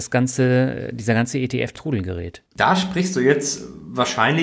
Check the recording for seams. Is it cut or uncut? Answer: cut